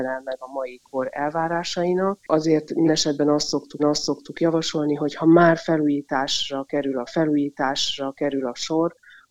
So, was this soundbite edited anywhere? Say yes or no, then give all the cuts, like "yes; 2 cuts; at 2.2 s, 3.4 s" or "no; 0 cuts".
yes; 4 cuts; at 2.2 s, 2.9 s, 3.8 s, 7.1 s